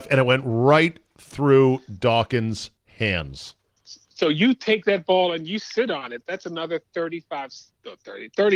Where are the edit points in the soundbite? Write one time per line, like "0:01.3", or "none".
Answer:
0:02.8